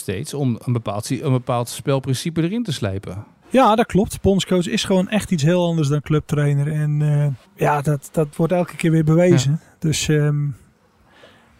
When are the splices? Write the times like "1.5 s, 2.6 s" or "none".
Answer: 7.4 s

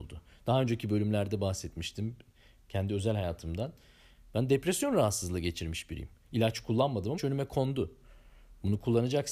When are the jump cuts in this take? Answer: 7.2 s

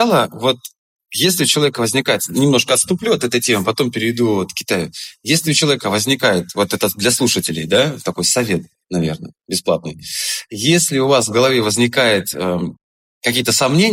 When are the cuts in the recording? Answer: none

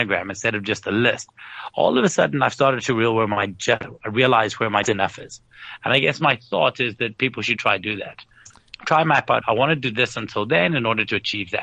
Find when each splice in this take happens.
4.8 s, 7.6 s

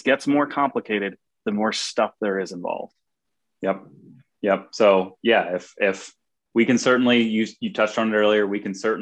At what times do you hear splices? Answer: none

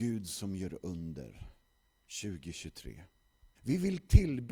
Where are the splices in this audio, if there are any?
3.5 s

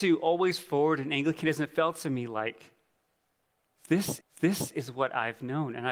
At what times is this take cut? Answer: 4.2 s

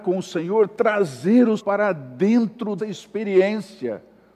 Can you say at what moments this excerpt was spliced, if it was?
1.6 s, 2.8 s

